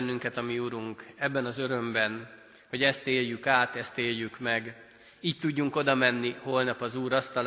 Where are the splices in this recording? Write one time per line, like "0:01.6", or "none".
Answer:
none